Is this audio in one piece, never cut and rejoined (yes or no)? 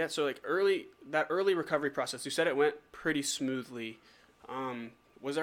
yes